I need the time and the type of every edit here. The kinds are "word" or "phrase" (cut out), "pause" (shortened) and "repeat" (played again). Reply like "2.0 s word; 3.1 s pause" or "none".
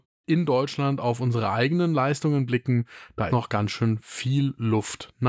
3.3 s word